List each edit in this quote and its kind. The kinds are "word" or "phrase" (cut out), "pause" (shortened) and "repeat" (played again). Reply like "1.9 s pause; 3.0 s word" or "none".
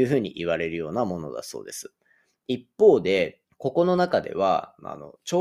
3.4 s pause